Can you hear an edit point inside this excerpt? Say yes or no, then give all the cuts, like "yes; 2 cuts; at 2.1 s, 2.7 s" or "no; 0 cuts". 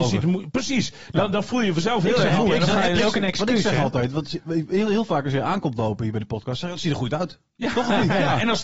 no; 0 cuts